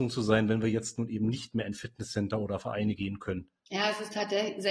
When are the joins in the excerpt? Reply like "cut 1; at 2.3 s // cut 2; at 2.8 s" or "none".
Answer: none

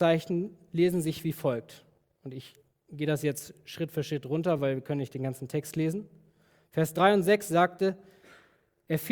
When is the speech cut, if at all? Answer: none

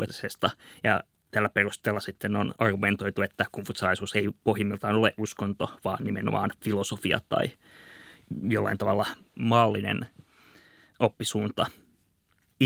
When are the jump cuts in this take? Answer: cut 1; at 1.1 s

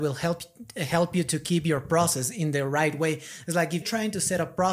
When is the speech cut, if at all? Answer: cut 1; at 3.8 s

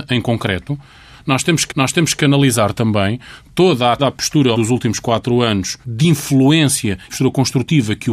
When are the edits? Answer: cut 1; at 1.7 s // cut 2; at 4.0 s // cut 3; at 4.5 s // cut 4; at 5.8 s // cut 5; at 7.1 s

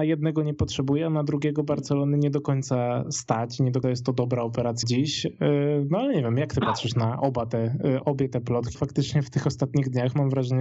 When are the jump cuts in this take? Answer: cut 1; at 3.8 s // cut 2; at 4.8 s // cut 3; at 8.0 s // cut 4; at 8.7 s

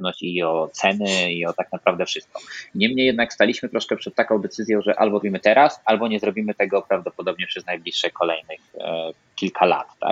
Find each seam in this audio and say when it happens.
cut 1; at 5.2 s

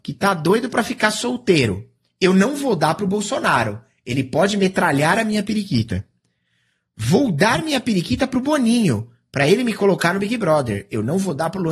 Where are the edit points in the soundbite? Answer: none

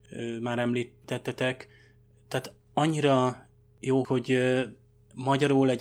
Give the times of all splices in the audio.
cut 1; at 4.0 s

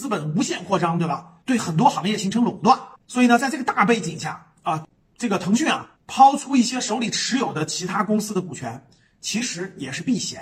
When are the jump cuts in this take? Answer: cut 1; at 1.4 s // cut 2; at 3.0 s // cut 3; at 6.0 s

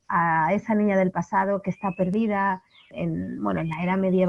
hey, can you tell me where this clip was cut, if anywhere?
none

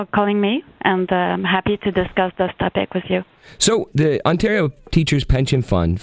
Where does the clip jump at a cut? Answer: none

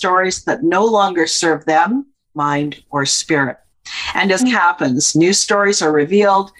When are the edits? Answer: cut 1; at 2.2 s // cut 2; at 4.4 s

